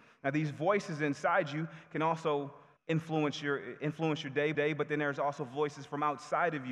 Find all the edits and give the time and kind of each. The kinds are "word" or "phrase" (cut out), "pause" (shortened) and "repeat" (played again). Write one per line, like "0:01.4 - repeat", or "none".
0:02.8 - pause
0:04.5 - repeat